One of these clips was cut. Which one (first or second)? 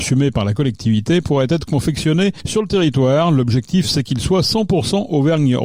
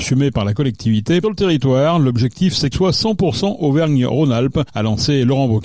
second